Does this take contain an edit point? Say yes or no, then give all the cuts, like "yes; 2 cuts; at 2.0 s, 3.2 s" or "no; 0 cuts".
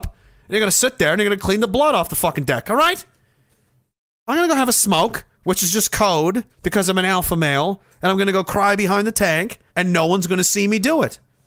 yes; 3 cuts; at 5.3 s, 6.5 s, 9.7 s